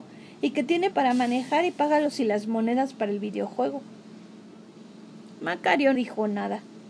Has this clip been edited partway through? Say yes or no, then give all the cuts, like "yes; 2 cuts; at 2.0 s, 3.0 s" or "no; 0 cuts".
yes; 3 cuts; at 0.9 s, 2.1 s, 5.9 s